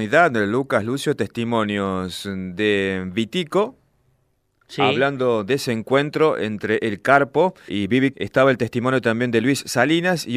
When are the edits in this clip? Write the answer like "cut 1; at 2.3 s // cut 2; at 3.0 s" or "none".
cut 1; at 7.7 s // cut 2; at 8.1 s